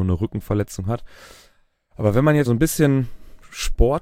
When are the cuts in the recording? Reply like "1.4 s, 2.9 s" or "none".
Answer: 2.5 s